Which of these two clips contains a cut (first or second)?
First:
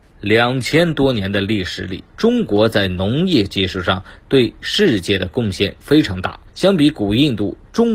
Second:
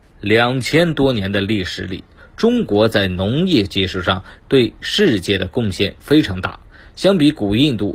first